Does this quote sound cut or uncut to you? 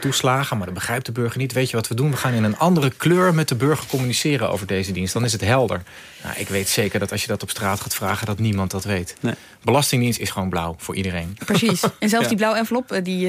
uncut